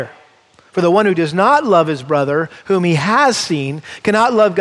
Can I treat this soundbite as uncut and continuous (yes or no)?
yes